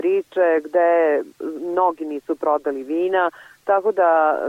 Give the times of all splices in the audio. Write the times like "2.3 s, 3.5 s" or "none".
none